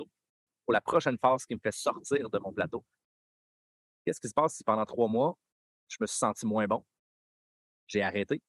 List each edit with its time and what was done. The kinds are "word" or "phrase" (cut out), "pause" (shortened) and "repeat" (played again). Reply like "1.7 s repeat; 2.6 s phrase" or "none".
none

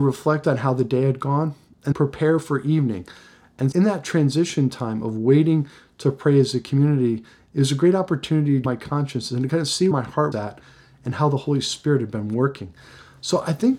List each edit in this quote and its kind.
1.9 s word; 3.7 s word; 8.6 s word; 9.9 s word; 10.3 s word

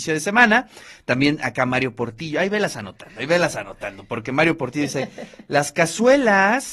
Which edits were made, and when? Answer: none

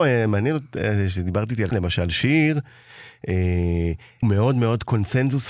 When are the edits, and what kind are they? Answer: 1.7 s phrase; 4.2 s word

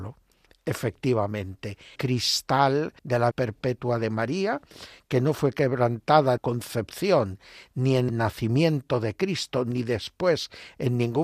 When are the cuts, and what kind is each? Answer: 1.9 s word; 3.0 s pause; 3.3 s word; 6.4 s phrase; 8.1 s word

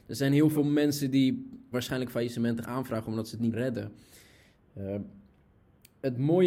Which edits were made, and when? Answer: 1.7 s word; 2.6 s word; 3.5 s word

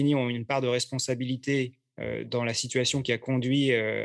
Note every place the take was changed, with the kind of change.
2.3 s word

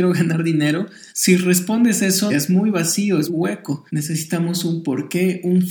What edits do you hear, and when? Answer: 1.1 s pause; 2.3 s phrase; 3.3 s word; 3.9 s pause

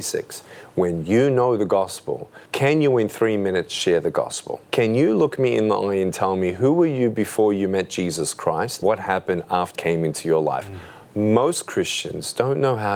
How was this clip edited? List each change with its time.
2.5 s pause; 4.6 s pause; 8.8 s word; 9.7 s word

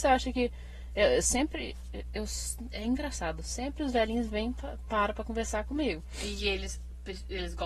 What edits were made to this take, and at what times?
none

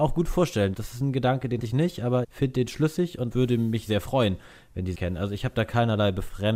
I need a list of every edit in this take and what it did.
1.6 s word; 2.2 s word; 3.3 s word; 3.9 s word; 4.9 s word

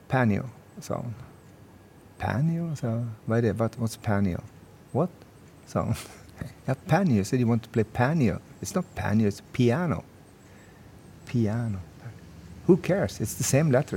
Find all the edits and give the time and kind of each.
none

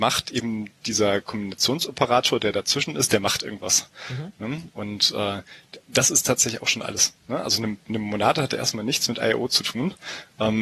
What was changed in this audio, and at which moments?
none

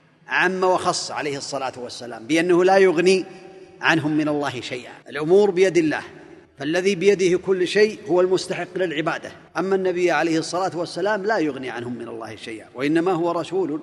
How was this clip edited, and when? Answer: 5.0 s pause; 6.4 s pause; 9.5 s pause

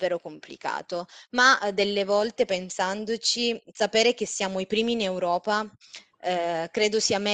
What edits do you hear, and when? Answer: none

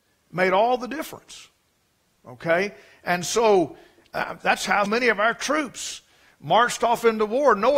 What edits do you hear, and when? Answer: 4.4 s word; 4.9 s word

